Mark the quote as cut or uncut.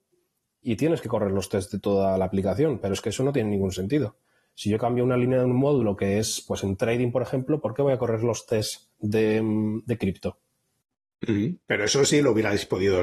uncut